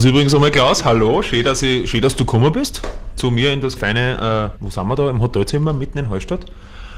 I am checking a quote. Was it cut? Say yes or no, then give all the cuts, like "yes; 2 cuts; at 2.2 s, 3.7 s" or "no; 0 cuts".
yes; 2 cuts; at 3.8 s, 4.6 s